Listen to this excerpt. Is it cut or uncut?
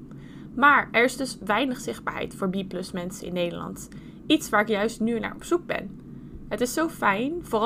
uncut